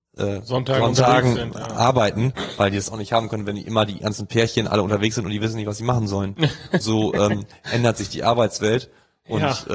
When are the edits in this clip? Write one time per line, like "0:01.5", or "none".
0:06.8